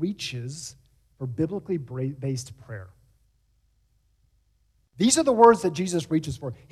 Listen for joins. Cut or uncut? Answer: uncut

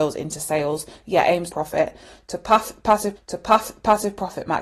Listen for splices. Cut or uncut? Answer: cut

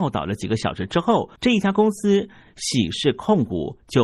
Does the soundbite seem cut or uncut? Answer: cut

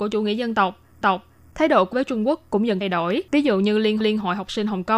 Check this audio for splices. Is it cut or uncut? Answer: cut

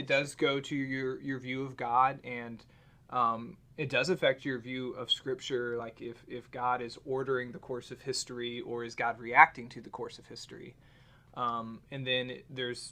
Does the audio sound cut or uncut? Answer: uncut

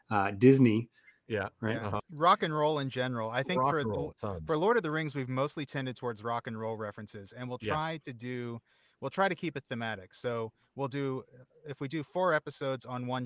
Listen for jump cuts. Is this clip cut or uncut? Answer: uncut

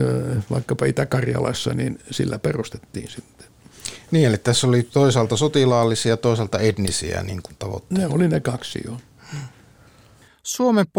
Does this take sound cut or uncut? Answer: uncut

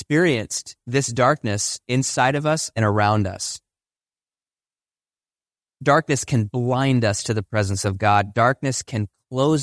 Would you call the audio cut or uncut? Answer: uncut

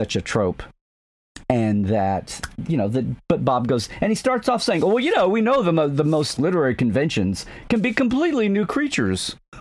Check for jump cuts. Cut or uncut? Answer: cut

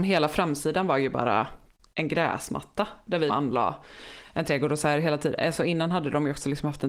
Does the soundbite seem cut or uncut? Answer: cut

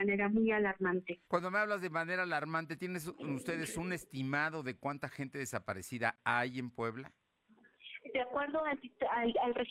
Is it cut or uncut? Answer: cut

